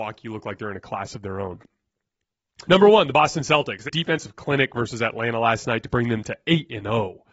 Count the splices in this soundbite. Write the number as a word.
two